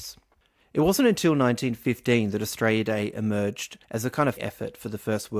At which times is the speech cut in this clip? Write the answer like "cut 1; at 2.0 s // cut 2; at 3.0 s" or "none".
cut 1; at 3.8 s // cut 2; at 4.4 s